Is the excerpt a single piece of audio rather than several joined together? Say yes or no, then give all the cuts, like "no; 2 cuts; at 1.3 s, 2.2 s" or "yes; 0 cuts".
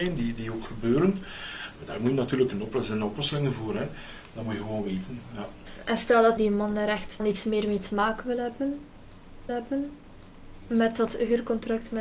no; 3 cuts; at 6.4 s, 7.2 s, 9.5 s